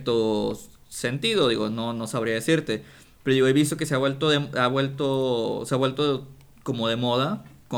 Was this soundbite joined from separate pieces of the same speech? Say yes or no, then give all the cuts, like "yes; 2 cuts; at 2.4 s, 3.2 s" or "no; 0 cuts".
no; 0 cuts